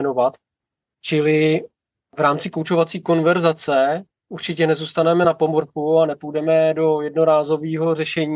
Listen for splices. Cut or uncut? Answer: uncut